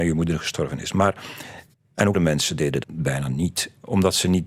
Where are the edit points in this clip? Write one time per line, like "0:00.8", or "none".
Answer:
0:01.7
0:02.1
0:02.8